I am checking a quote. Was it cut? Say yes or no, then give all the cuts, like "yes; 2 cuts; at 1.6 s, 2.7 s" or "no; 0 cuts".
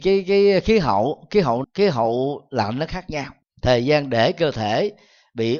yes; 2 cuts; at 1.6 s, 3.4 s